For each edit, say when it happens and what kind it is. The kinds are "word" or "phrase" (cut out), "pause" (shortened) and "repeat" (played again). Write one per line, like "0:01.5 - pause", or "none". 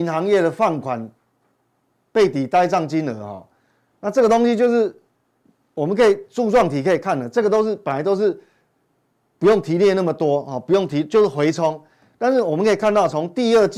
0:05.4 - pause